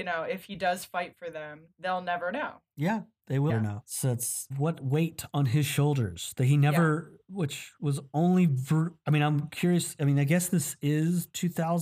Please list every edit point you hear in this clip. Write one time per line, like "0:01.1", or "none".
0:03.5
0:04.5
0:09.0